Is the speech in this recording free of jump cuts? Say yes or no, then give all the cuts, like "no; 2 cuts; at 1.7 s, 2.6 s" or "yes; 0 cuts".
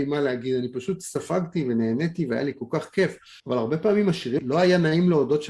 no; 2 cuts; at 3.4 s, 4.4 s